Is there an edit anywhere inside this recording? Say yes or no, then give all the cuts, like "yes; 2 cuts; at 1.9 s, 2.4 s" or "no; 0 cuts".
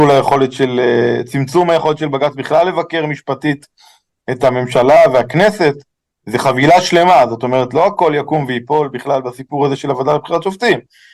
no; 0 cuts